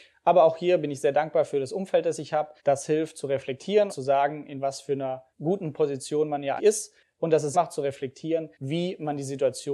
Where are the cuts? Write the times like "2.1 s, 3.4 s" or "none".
2.6 s, 3.9 s, 5.3 s, 6.6 s, 7.5 s, 8.5 s